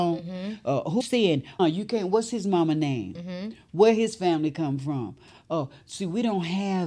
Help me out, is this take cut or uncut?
cut